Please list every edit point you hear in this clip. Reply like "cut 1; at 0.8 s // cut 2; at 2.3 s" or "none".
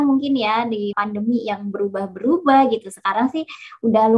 cut 1; at 0.9 s